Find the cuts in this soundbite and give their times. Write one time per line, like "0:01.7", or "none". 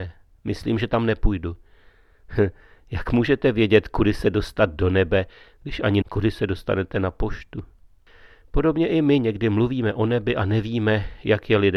0:06.0

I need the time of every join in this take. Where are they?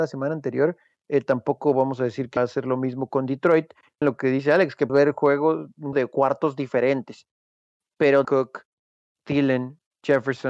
0:02.4
0:04.0
0:04.9
0:05.9
0:08.2

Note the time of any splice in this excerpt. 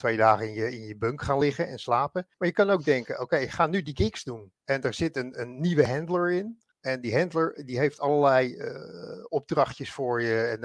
0:02.3
0:04.6
0:06.7

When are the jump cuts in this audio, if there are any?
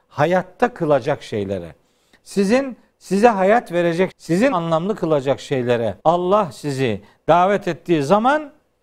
0:04.1
0:04.5
0:06.0

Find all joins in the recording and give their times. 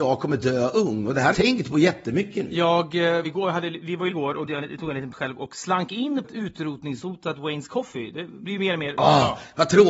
0:01.3
0:03.2
0:04.1
0:04.5
0:05.1
0:06.2
0:08.5

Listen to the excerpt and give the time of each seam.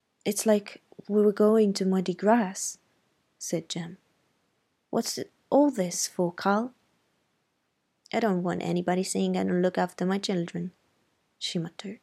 none

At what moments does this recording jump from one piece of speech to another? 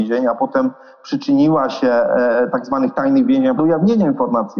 0:03.6

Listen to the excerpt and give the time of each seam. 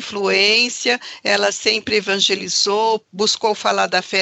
none

